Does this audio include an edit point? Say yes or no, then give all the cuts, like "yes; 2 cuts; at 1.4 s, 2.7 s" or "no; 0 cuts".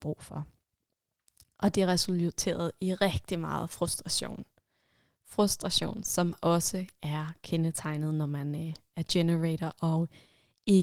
no; 0 cuts